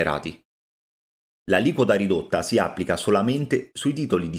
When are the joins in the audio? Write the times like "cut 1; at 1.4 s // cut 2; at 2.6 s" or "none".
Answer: none